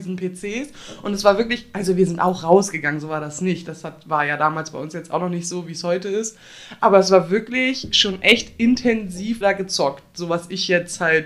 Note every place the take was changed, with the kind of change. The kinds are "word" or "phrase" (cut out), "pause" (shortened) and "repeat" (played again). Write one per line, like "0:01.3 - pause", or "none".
0:09.4 - word